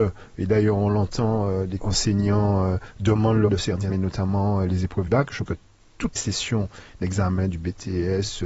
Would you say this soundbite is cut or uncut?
cut